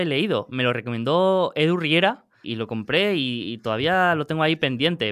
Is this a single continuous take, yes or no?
no